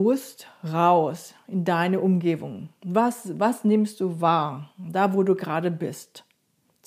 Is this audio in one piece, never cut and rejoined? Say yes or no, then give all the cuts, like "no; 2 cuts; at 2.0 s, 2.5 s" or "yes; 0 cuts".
yes; 0 cuts